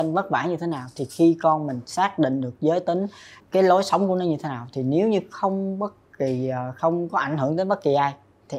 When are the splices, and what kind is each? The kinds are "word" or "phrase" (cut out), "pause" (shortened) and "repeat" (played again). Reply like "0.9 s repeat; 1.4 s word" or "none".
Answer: 3.4 s word